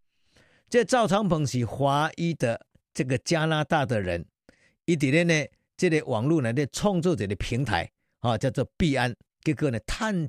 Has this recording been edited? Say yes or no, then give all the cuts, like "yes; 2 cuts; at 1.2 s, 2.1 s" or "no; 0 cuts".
no; 0 cuts